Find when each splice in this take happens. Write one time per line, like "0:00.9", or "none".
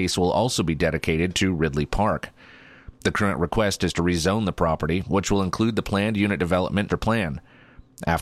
0:06.9